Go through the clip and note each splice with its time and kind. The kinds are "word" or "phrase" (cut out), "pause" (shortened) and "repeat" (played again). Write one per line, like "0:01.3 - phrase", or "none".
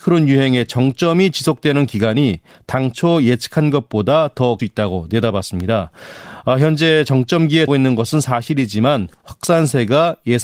0:04.6 - phrase
0:07.7 - word